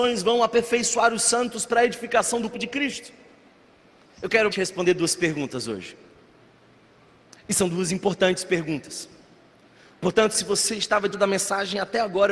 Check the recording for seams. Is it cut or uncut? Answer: cut